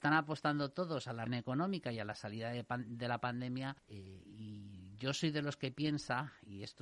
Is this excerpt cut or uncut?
cut